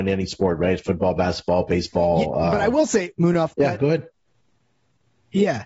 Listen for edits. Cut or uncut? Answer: uncut